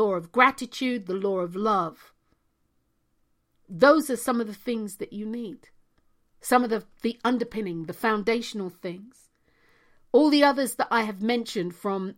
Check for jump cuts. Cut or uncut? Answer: uncut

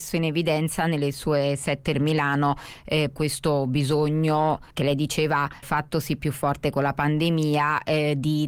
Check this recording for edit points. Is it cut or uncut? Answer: cut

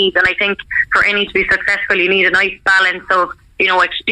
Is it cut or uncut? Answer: cut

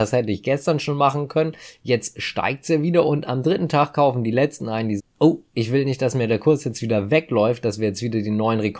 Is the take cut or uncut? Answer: cut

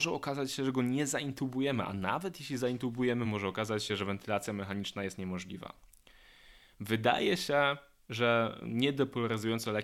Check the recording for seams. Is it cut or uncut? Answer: uncut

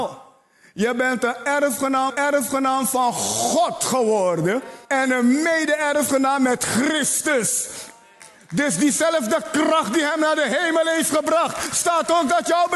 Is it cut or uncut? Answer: cut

